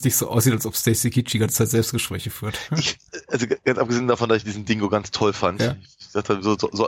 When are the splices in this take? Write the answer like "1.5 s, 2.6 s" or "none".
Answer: none